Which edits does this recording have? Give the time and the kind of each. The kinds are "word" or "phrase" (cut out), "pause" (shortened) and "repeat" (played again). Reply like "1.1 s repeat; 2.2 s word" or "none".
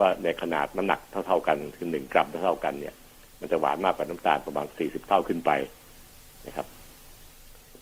none